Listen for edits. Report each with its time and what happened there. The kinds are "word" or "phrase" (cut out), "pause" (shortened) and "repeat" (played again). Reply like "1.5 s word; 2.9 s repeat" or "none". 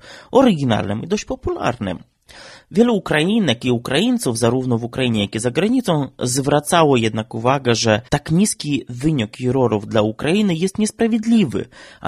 8.1 s pause